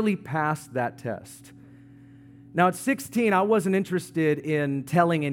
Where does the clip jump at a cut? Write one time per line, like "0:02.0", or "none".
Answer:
none